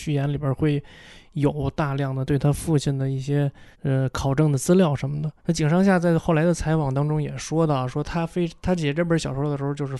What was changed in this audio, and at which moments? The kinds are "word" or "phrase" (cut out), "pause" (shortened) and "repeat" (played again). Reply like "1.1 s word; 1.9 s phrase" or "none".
3.7 s pause; 5.4 s pause

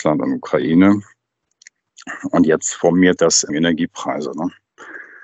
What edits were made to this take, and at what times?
3.2 s word; 3.5 s word

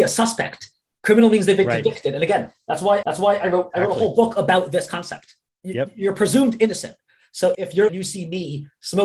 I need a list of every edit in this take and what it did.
3.0 s repeat; 5.5 s pause; 7.5 s phrase; 7.9 s phrase

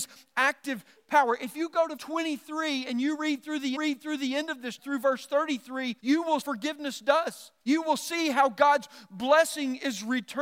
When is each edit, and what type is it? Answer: 2.0 s word; 3.8 s repeat; 4.8 s word; 6.0 s pause; 6.4 s phrase; 7.6 s pause

